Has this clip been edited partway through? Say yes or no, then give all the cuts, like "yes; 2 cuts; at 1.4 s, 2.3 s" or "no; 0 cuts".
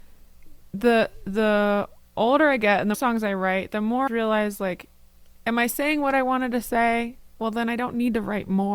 yes; 2 cuts; at 2.9 s, 4.1 s